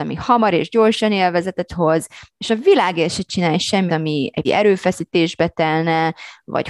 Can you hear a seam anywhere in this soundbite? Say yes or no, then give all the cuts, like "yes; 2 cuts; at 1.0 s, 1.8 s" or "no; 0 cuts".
yes; 3 cuts; at 1.7 s, 3.9 s, 4.4 s